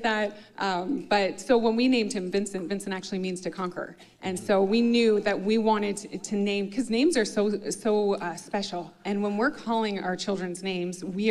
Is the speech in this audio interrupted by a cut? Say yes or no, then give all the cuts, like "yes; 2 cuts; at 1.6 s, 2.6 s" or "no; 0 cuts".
no; 0 cuts